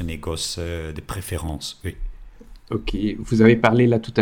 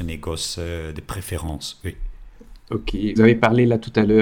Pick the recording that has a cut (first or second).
second